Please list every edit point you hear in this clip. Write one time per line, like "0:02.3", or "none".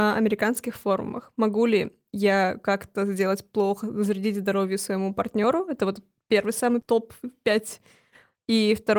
none